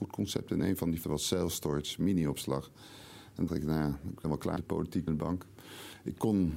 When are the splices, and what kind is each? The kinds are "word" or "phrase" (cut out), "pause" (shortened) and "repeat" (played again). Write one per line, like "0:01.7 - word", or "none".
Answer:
0:01.0 - word
0:03.5 - word
0:04.2 - word
0:04.6 - word
0:05.1 - word